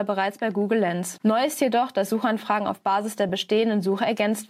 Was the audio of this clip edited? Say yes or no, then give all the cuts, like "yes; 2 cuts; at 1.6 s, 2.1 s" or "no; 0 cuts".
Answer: no; 0 cuts